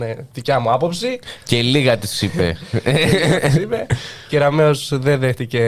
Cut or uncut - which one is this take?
uncut